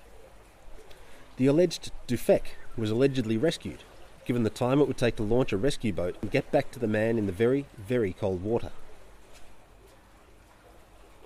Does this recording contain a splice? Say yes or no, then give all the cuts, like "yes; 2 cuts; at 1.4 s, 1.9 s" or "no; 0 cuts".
no; 0 cuts